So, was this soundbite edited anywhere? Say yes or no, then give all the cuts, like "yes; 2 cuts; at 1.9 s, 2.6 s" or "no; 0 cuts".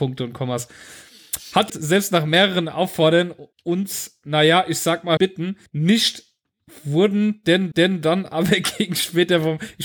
yes; 5 cuts; at 1.7 s, 3.5 s, 5.2 s, 5.7 s, 7.7 s